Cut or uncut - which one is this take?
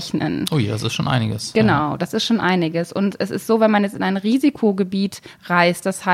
uncut